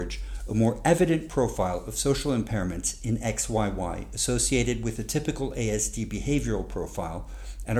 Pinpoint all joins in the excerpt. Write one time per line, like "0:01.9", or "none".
none